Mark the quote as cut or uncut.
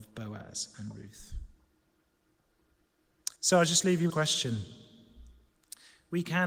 cut